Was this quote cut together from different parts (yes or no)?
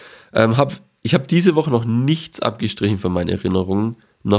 no